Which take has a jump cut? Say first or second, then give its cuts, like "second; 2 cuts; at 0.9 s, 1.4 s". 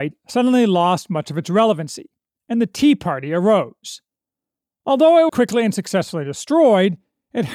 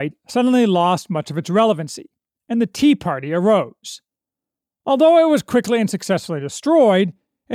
first; 1 cut; at 5.3 s